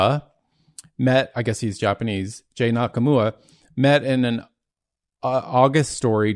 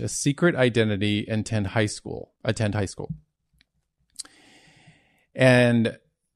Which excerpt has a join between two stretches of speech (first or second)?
second